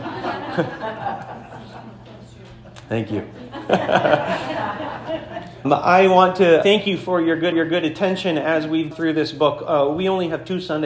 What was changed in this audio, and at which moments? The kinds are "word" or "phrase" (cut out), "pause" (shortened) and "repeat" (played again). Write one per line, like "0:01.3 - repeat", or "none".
0:05.6 - word
0:06.6 - word
0:07.5 - repeat
0:08.9 - word